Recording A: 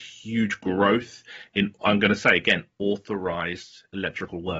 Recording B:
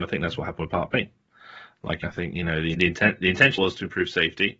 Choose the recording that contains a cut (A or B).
B